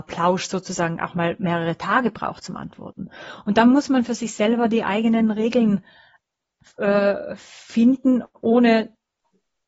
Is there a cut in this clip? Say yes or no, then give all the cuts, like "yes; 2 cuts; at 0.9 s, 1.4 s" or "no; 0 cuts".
no; 0 cuts